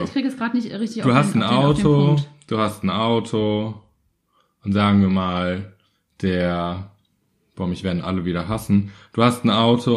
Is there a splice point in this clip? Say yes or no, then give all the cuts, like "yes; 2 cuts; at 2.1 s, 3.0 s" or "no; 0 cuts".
no; 0 cuts